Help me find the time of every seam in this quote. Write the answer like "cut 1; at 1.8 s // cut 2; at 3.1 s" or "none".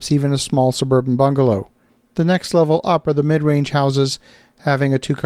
none